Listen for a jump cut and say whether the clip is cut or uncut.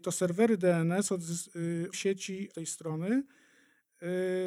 cut